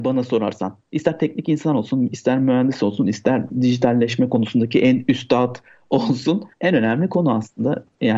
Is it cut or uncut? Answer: cut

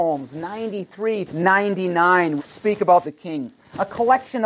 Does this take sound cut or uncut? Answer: cut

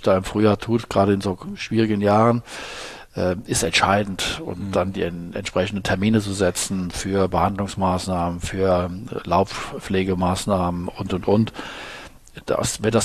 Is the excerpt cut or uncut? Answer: uncut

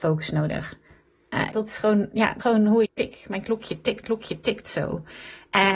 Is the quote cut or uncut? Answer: cut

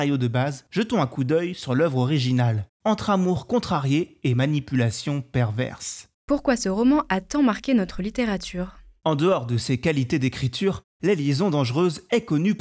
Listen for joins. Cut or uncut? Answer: uncut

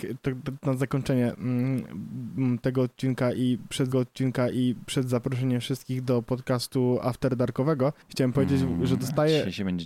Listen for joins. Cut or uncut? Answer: cut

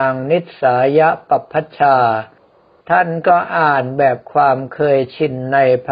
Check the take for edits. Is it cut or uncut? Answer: uncut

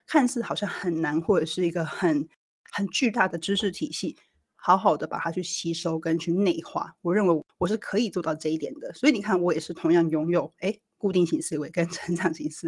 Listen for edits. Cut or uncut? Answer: uncut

